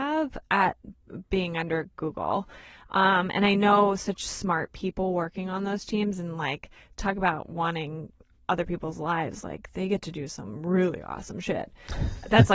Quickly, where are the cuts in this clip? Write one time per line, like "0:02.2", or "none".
none